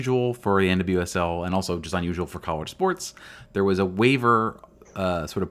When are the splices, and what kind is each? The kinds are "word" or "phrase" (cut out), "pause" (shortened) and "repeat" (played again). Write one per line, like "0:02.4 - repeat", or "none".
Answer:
none